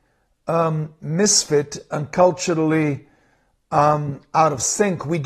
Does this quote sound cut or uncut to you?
uncut